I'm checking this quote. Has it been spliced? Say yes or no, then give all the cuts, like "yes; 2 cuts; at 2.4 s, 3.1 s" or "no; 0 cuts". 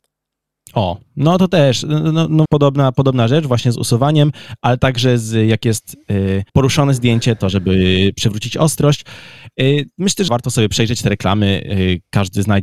yes; 3 cuts; at 2.5 s, 6.5 s, 10.3 s